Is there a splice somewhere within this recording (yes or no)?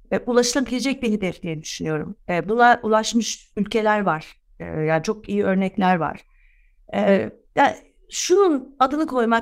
no